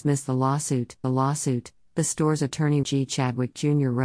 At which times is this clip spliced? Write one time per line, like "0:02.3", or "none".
0:01.0
0:02.8